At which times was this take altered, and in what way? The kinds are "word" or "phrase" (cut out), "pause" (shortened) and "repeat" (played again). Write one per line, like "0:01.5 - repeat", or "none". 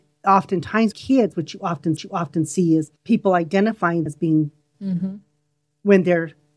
0:00.9 - word
0:02.0 - repeat
0:03.0 - pause
0:04.1 - word
0:04.7 - word